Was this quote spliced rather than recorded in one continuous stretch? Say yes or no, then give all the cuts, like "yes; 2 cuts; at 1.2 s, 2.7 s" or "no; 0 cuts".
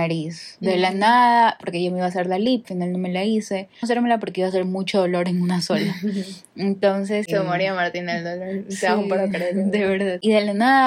yes; 2 cuts; at 2.6 s, 3.8 s